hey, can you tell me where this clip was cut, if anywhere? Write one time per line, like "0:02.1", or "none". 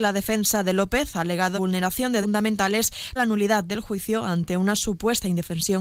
0:01.5
0:02.2
0:03.2